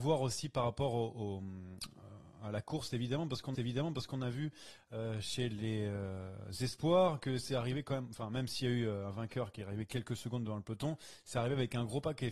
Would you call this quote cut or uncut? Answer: cut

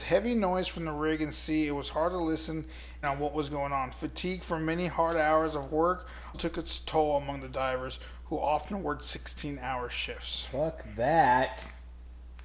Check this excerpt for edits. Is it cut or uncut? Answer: cut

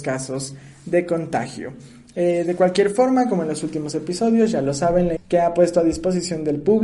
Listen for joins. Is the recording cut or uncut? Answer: cut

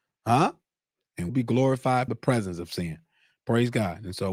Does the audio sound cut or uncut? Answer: cut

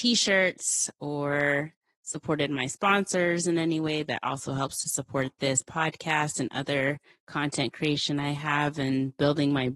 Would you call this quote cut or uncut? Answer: uncut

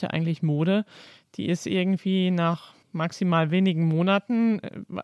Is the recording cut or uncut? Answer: cut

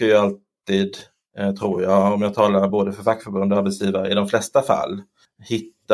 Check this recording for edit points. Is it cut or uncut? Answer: uncut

